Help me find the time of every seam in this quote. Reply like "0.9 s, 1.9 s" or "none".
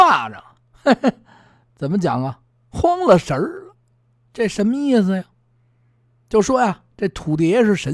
none